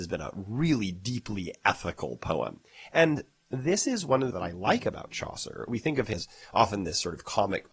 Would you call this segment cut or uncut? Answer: cut